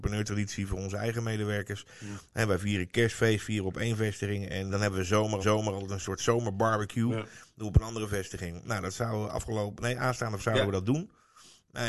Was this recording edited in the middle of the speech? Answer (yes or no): yes